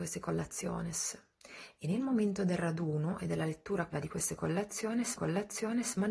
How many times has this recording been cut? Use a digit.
2